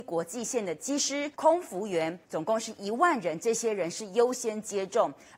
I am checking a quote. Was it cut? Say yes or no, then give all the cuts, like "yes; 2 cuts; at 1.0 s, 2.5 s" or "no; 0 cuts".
yes; 2 cuts; at 1.3 s, 2.2 s